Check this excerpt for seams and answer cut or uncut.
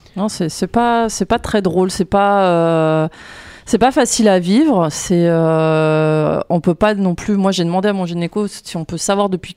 uncut